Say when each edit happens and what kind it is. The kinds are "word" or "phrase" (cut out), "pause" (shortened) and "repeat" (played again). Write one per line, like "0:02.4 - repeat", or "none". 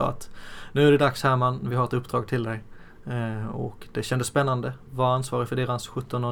none